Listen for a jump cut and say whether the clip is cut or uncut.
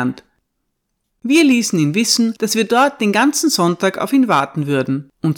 uncut